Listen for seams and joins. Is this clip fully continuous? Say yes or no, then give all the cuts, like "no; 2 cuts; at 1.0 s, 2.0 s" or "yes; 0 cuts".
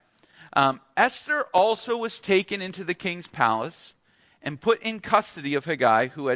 yes; 0 cuts